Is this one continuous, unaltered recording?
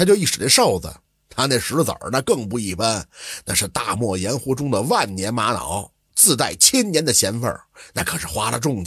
yes; 0 cuts

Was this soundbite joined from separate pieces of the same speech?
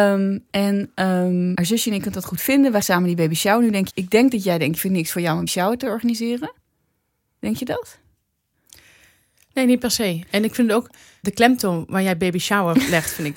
yes; 6 cuts; at 1.5 s, 2.8 s, 3.9 s, 4.8 s, 5.5 s, 11.2 s

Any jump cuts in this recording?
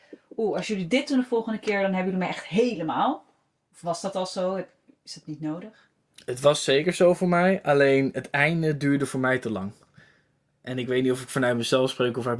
no; 0 cuts

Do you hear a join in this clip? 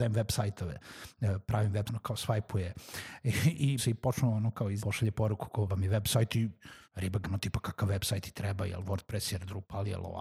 yes; 6 cuts; at 1.9 s, 3.8 s, 4.8 s, 5.7 s, 6.8 s, 7.2 s

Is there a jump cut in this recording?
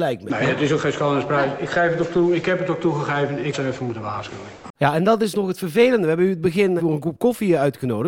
yes; 2 cuts; at 3.5 s, 6.8 s

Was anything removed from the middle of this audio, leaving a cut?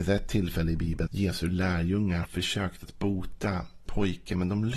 yes; 3 cuts; at 1.1 s, 2.2 s, 3.9 s

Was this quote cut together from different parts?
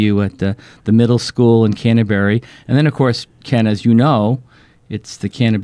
no; 0 cuts

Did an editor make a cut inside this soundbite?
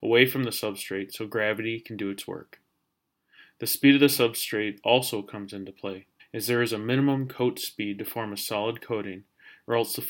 yes; 1 cut; at 6.2 s

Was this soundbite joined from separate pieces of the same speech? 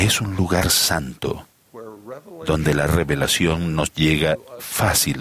no; 0 cuts

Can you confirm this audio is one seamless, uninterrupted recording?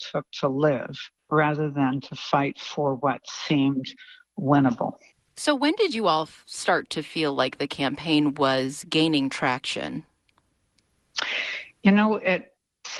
no; 2 cuts; at 1.2 s, 5.1 s

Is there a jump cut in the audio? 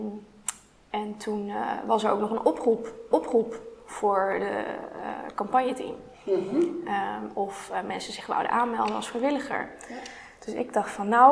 yes; 1 cut; at 3.1 s

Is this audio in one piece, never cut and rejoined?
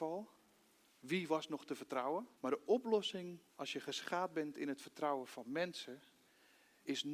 no; 2 cuts; at 2.3 s, 3.5 s

